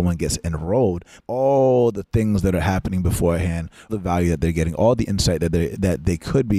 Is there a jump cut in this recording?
yes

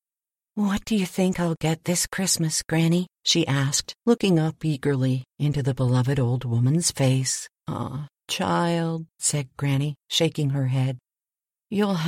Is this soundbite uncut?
no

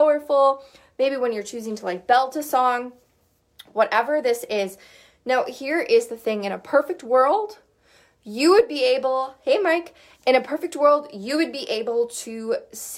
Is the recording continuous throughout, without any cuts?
yes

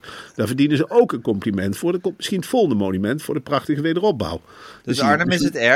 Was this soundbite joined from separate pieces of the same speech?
no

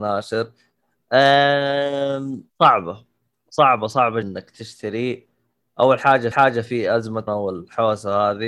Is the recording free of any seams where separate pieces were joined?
no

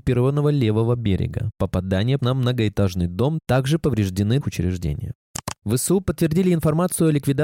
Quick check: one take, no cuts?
no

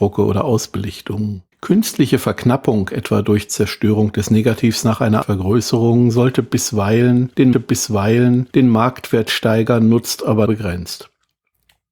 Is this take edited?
yes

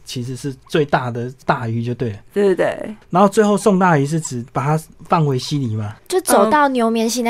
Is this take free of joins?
no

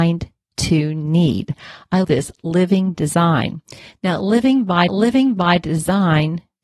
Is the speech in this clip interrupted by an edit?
yes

